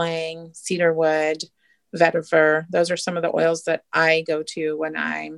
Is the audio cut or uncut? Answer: uncut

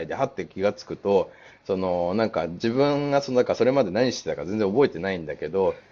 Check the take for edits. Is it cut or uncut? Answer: uncut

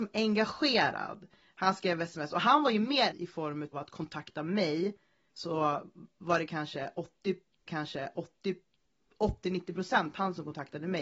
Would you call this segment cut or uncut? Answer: cut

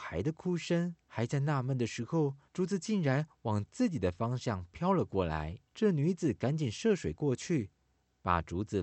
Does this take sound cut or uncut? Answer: cut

